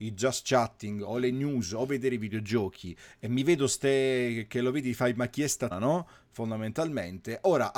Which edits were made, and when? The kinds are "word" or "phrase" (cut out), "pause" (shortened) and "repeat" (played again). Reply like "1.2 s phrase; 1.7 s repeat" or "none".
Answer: 5.7 s word